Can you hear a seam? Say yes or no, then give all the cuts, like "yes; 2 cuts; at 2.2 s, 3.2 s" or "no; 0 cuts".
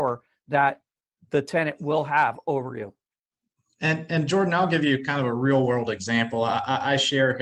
no; 0 cuts